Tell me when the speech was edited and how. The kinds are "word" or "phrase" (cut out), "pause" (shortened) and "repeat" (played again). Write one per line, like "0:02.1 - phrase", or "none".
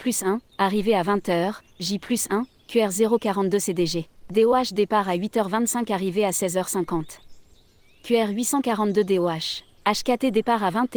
none